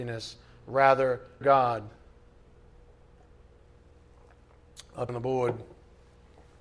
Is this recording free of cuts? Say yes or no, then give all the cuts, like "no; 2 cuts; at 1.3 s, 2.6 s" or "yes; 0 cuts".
no; 2 cuts; at 1.4 s, 5.1 s